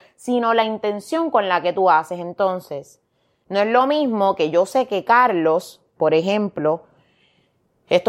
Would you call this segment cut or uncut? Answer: uncut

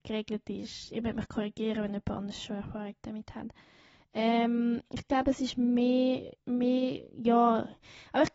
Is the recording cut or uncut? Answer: cut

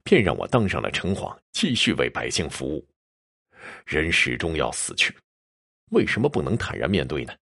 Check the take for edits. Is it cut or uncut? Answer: cut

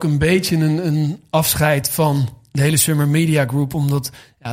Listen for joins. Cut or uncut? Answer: uncut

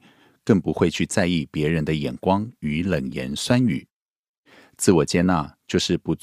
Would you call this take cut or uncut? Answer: uncut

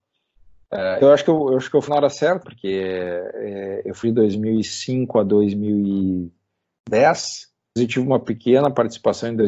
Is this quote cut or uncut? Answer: cut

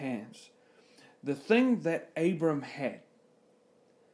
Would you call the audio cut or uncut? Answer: uncut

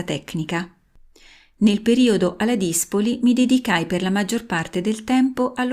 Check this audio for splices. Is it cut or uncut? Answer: uncut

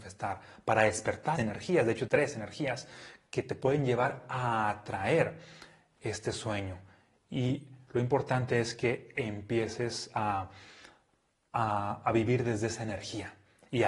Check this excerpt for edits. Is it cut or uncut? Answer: cut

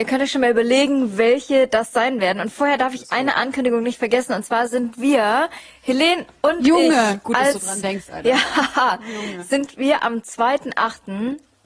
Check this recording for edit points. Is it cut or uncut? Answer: uncut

